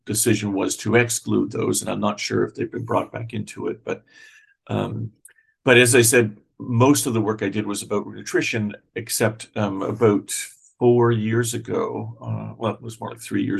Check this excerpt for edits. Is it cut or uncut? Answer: uncut